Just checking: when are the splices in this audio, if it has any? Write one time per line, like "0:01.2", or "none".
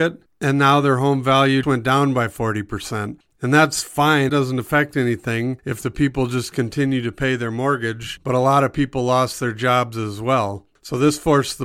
0:01.6
0:04.3